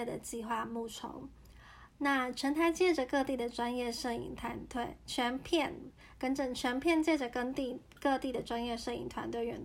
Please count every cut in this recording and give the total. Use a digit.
0